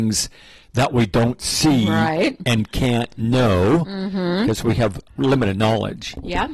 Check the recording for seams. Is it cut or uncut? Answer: uncut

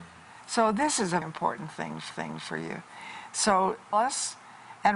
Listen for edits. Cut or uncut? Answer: cut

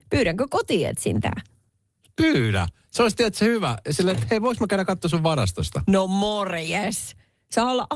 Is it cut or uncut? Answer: uncut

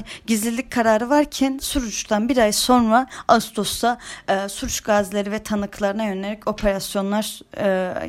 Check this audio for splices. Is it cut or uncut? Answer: uncut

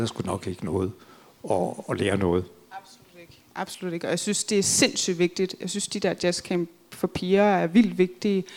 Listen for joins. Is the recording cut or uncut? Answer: uncut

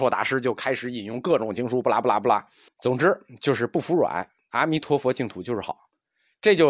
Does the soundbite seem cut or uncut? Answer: cut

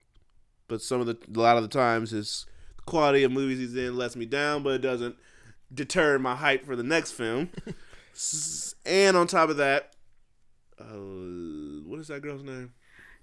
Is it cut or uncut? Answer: uncut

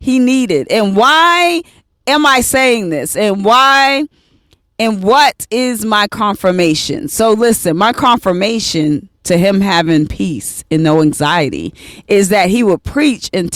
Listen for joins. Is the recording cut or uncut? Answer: uncut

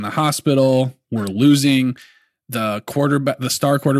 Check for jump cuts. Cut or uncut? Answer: uncut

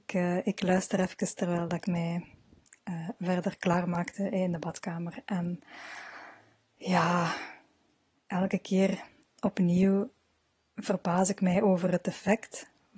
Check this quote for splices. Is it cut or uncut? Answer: uncut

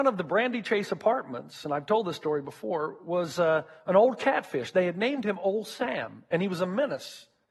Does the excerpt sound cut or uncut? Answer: uncut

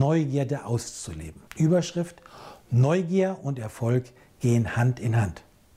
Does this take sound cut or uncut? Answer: cut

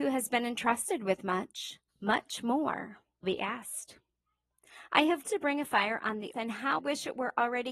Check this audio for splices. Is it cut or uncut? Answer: cut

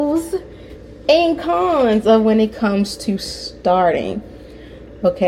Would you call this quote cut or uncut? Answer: uncut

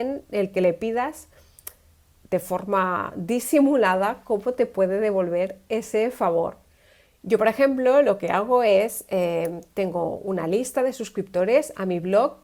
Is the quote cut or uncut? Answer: uncut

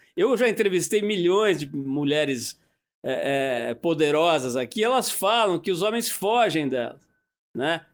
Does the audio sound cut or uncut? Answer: uncut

